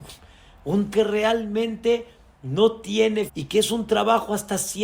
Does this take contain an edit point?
yes; 2 cuts; at 0.9 s, 3.3 s

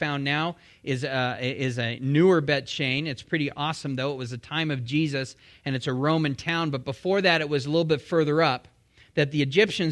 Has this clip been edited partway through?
no; 0 cuts

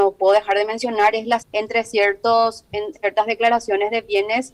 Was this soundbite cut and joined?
yes; 2 cuts; at 1.4 s, 2.9 s

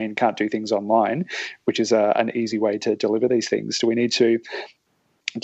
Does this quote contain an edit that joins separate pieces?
no; 0 cuts

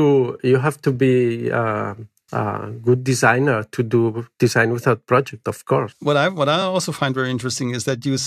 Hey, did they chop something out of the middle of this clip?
no; 0 cuts

